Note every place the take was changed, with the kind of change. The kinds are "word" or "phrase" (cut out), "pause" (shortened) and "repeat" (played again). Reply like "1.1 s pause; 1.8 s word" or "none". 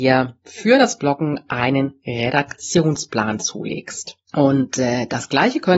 4.2 s pause

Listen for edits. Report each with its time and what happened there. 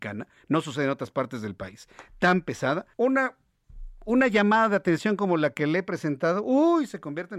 2.9 s pause

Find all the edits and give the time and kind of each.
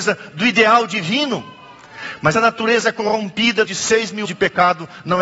2.3 s word; 3.7 s word; 4.2 s word

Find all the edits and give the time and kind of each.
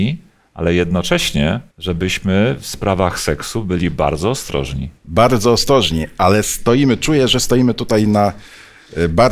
1.7 s pause; 5.0 s pause

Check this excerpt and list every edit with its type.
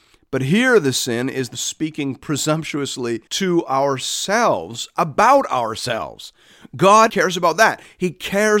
1.5 s phrase; 3.3 s pause; 7.1 s word

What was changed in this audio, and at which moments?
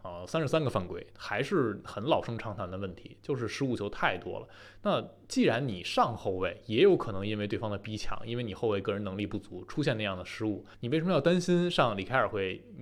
10.7 s pause

